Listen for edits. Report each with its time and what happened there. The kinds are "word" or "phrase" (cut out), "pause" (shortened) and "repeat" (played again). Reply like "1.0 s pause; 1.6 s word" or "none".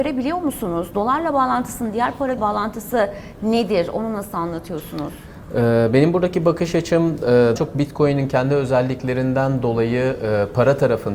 2.4 s word; 7.6 s word